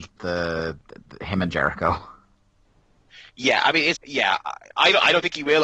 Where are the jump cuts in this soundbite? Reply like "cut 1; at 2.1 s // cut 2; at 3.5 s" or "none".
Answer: cut 1; at 4.0 s